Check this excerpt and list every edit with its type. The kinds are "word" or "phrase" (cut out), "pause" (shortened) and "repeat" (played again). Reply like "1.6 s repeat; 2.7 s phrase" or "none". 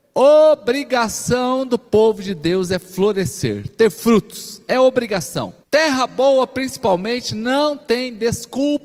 5.6 s pause